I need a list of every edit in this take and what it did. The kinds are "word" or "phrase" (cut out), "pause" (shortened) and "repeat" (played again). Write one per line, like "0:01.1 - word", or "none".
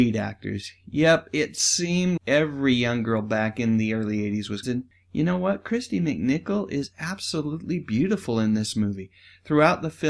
0:02.2 - word
0:04.6 - phrase